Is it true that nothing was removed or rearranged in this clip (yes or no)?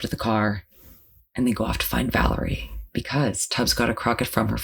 yes